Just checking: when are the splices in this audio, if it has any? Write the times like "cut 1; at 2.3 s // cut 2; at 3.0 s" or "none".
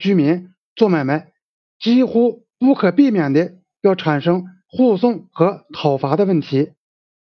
cut 1; at 2.5 s